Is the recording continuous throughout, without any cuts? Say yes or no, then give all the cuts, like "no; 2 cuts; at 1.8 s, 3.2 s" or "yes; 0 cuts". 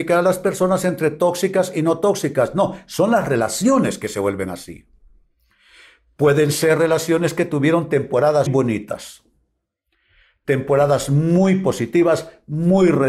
no; 1 cut; at 8.5 s